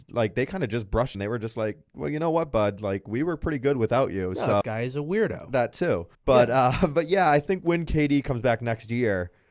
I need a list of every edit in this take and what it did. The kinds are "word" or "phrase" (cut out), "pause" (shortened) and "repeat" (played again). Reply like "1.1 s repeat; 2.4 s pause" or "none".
1.1 s phrase; 4.6 s phrase; 6.1 s pause